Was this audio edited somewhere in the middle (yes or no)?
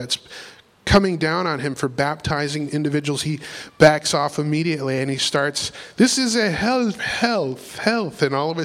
yes